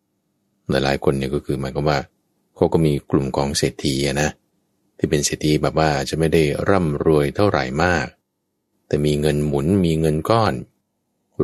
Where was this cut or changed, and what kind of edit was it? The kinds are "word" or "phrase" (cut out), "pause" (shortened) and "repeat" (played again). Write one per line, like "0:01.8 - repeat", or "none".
none